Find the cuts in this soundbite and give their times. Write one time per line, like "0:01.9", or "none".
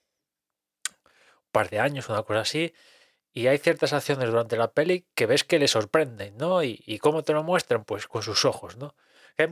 none